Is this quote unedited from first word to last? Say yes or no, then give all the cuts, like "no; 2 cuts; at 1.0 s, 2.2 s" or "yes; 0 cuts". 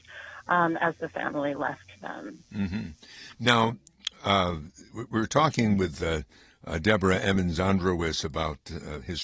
yes; 0 cuts